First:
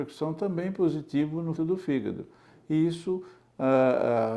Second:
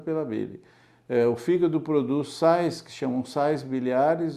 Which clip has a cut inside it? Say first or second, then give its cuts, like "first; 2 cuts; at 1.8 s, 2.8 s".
first; 1 cut; at 1.6 s